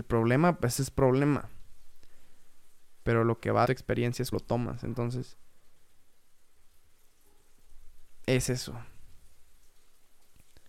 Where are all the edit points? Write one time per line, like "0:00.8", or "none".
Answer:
0:03.6
0:04.3